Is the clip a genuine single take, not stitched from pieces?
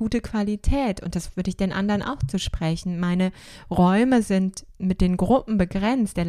yes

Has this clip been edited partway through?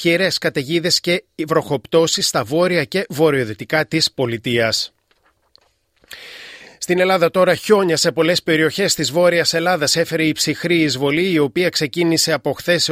no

